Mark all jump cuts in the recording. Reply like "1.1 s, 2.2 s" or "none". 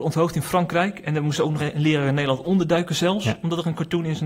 1.6 s